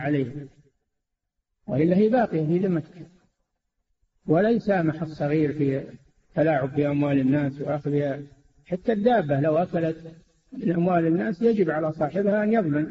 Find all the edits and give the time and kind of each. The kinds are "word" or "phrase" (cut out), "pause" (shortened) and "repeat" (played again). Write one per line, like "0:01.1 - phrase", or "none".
none